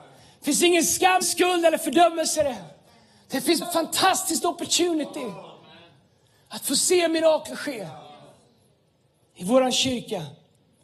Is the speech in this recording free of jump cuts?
no; 2 cuts; at 1.2 s, 3.6 s

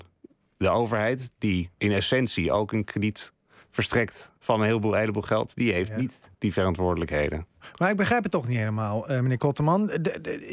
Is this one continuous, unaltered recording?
no; 3 cuts; at 1.7 s, 4.4 s, 6.3 s

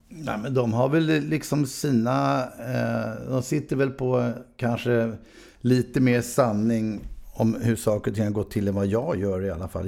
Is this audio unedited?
yes; 0 cuts

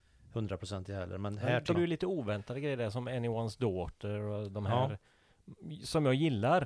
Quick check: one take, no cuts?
no; 1 cut; at 1.7 s

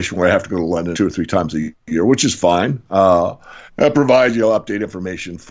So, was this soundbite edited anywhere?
yes; 2 cuts; at 0.9 s, 3.7 s

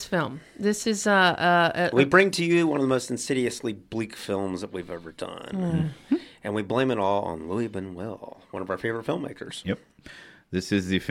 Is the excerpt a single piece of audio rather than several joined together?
yes; 0 cuts

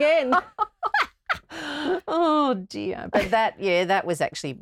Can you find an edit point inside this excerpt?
no; 0 cuts

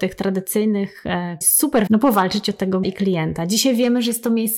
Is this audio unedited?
no; 3 cuts; at 1.4 s, 1.9 s, 2.8 s

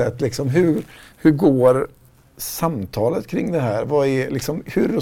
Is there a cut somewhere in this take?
no; 0 cuts

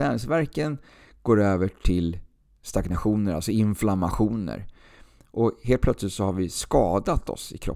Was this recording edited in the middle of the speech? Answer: no; 0 cuts

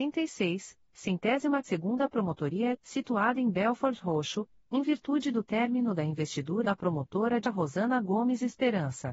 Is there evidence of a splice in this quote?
yes; 4 cuts; at 1.6 s, 2.7 s, 6.6 s, 7.4 s

